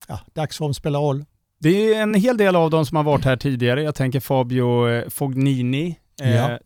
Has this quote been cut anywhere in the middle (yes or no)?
no